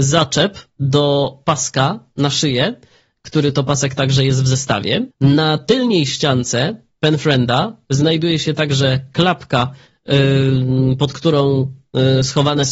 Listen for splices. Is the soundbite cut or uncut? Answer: cut